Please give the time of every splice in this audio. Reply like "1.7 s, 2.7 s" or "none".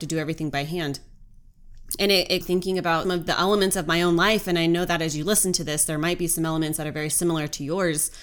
2.4 s, 3.0 s